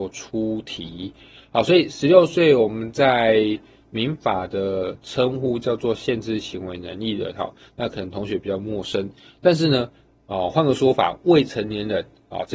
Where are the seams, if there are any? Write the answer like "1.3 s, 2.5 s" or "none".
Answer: none

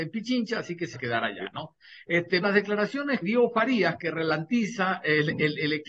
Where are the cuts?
0.9 s, 2.4 s, 3.2 s

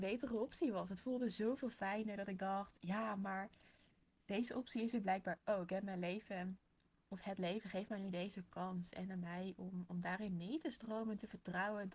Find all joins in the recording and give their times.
none

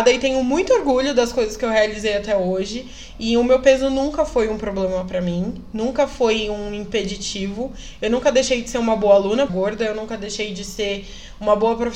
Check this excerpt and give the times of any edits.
9.5 s

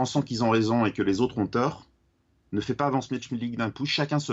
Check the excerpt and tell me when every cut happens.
none

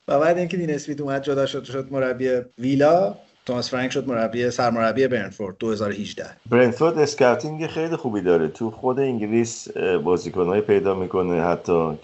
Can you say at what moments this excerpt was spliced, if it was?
2.5 s, 6.4 s

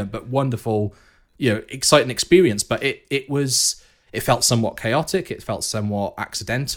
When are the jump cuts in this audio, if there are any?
none

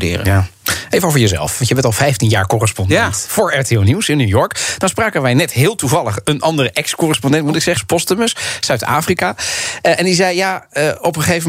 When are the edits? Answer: 7.8 s

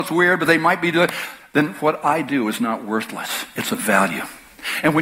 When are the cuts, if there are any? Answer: none

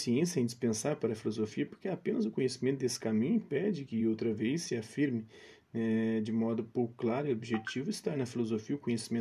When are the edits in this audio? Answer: none

